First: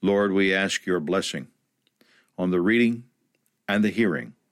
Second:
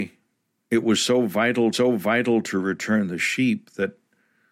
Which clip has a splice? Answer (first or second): second